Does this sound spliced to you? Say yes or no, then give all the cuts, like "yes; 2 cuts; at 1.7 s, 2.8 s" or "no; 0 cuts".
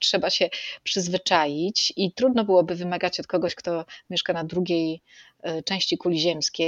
no; 0 cuts